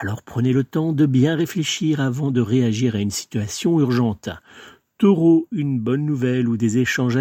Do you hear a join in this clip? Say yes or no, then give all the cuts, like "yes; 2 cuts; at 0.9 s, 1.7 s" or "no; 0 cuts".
no; 0 cuts